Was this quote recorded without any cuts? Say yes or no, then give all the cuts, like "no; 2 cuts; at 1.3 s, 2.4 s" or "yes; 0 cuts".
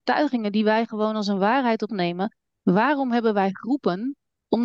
no; 1 cut; at 1.9 s